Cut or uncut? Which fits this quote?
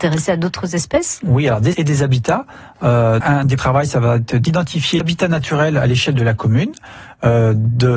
cut